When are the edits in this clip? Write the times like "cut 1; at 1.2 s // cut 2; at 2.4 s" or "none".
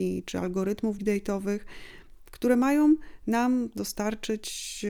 cut 1; at 1.0 s